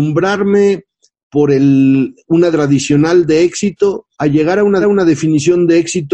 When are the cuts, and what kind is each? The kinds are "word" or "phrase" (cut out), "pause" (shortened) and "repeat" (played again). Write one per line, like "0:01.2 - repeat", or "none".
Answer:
0:02.5 - word
0:04.1 - pause
0:04.8 - repeat